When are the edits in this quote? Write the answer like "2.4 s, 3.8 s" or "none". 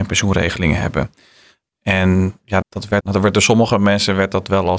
2.6 s, 3.0 s

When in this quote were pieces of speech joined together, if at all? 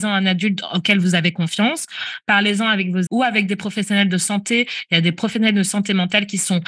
3.1 s

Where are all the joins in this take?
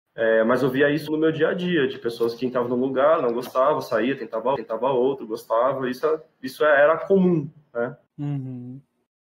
1.1 s, 4.6 s, 8.1 s

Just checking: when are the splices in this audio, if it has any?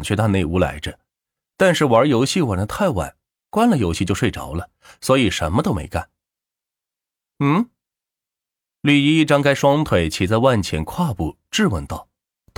none

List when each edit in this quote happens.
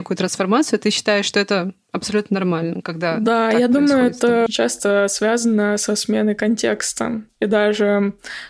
4.5 s

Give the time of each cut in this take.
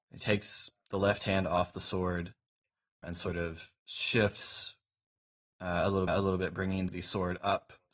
3.0 s, 6.1 s, 6.9 s

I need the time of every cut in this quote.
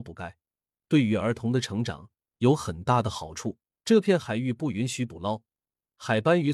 3.7 s

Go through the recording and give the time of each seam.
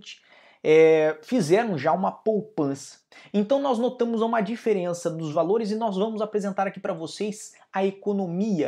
none

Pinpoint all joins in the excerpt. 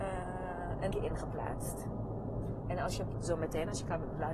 0.9 s, 3.1 s

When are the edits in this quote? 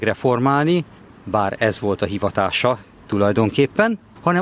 none

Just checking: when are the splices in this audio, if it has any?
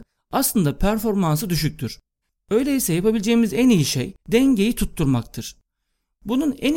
2.2 s, 4.2 s

